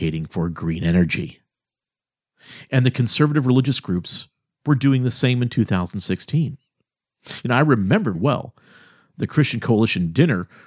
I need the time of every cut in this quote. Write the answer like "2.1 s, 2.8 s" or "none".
8.1 s